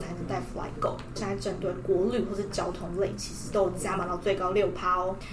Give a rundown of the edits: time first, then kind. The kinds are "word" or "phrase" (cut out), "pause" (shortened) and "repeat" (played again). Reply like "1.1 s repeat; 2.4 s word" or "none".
1.2 s phrase